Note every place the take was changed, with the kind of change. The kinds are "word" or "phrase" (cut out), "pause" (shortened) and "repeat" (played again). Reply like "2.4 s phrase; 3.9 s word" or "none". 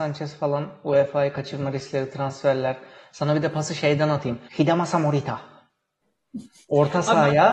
4.5 s pause